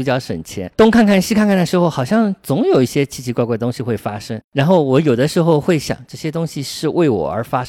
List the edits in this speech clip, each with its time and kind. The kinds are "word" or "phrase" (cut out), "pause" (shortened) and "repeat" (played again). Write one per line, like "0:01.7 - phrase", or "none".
0:04.4 - pause